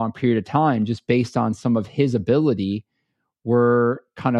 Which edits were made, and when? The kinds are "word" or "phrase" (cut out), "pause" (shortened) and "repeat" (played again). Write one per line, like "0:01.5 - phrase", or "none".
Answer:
none